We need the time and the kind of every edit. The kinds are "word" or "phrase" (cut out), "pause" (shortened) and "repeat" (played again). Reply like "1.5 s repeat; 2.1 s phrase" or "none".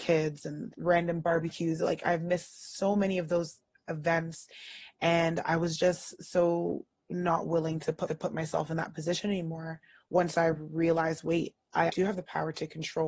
8.1 s repeat; 11.9 s word